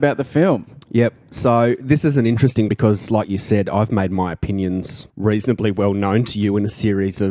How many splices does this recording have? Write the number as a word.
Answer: two